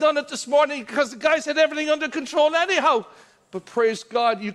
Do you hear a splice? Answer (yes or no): no